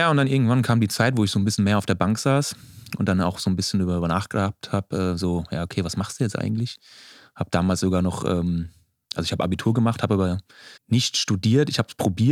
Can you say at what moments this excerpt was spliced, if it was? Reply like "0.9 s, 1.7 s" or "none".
10.8 s